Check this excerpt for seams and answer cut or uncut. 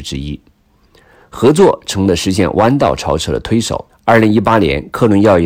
cut